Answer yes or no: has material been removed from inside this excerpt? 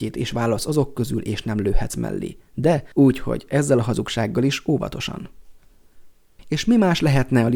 yes